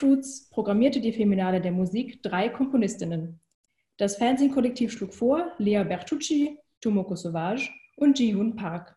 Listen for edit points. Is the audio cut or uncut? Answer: uncut